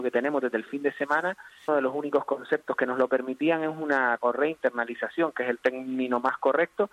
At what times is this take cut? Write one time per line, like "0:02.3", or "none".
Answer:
0:01.7
0:04.2